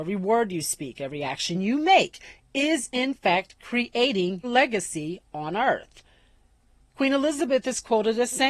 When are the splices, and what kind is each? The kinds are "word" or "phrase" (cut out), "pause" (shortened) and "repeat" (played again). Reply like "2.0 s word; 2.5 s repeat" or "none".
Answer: 1.5 s phrase; 4.4 s word